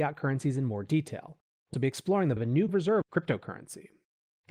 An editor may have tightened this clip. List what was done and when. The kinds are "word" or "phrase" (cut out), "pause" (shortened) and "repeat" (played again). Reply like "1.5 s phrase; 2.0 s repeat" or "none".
1.7 s word; 2.4 s word; 2.7 s word; 3.0 s word

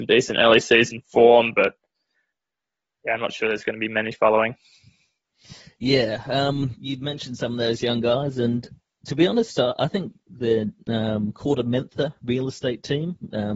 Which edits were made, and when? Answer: none

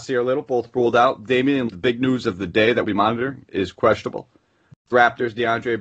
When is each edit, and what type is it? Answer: 1.7 s word; 2.8 s word; 4.9 s word

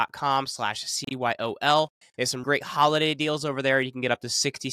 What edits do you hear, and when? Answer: 2.0 s pause; 2.4 s word

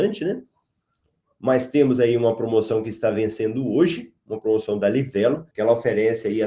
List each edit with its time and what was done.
5.5 s pause

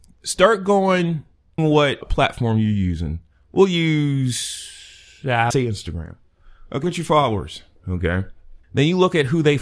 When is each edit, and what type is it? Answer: 1.6 s word; 2.0 s word; 3.3 s pause; 5.5 s phrase; 6.8 s word; 8.6 s pause

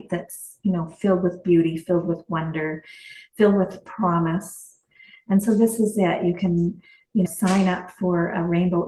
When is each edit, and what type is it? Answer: 7.3 s word

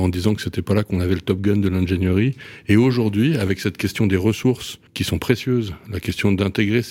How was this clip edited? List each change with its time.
4.9 s pause

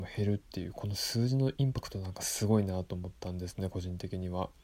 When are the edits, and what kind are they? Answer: 3.2 s pause

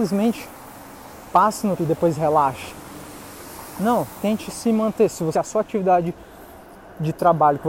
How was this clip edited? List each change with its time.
1.8 s word; 5.3 s word

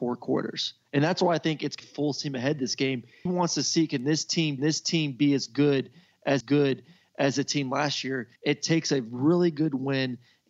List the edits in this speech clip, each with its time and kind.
1.8 s phrase; 3.3 s phrase; 4.6 s repeat; 6.4 s repeat; 8.4 s pause

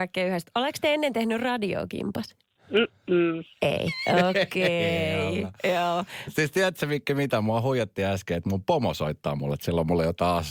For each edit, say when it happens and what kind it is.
2.4 s pause

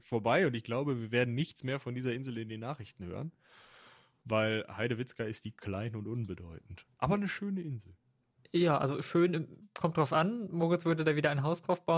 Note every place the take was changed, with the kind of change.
none

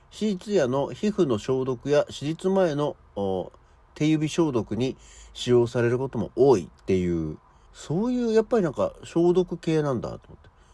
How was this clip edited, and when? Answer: 6.7 s pause; 7.7 s word

